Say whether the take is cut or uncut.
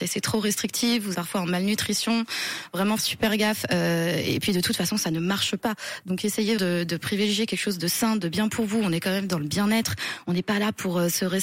cut